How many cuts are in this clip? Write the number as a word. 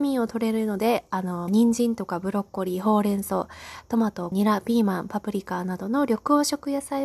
two